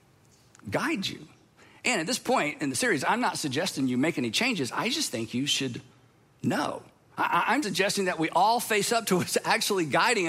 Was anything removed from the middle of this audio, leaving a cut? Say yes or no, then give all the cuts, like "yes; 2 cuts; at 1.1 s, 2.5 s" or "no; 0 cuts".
yes; 1 cut; at 7.6 s